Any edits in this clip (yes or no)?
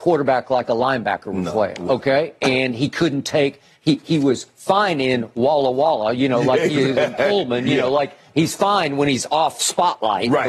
no